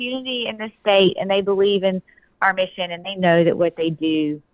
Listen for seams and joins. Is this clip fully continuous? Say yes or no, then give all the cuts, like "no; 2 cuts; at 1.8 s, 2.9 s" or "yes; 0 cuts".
yes; 0 cuts